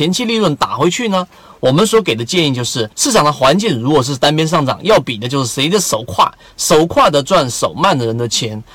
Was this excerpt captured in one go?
no; 1 cut; at 2.9 s

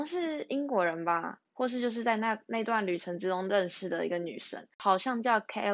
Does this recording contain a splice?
yes; 1 cut; at 1.5 s

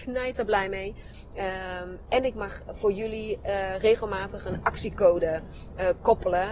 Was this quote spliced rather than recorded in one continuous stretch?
no; 0 cuts

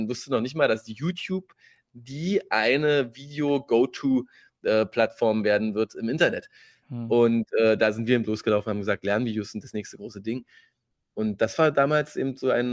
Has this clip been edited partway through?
no; 0 cuts

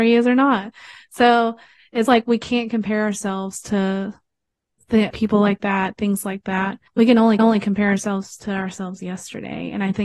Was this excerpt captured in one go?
no; 4 cuts; at 2.1 s, 5.1 s, 6.9 s, 7.4 s

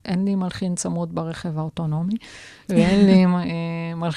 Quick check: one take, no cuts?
yes; 0 cuts

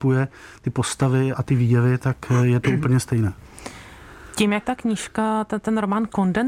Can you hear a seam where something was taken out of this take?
yes; 2 cuts; at 1.3 s, 4.6 s

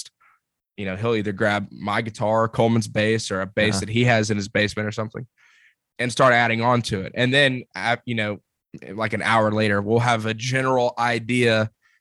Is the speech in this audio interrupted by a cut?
no; 0 cuts

